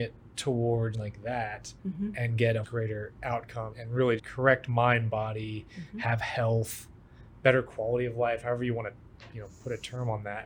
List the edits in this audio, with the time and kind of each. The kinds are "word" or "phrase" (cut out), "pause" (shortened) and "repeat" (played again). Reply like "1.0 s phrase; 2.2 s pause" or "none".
0.9 s word; 1.8 s pause; 2.6 s word; 3.7 s word; 4.2 s word